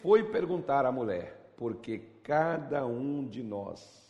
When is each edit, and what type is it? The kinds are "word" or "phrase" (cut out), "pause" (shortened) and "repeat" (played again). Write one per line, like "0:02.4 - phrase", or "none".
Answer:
none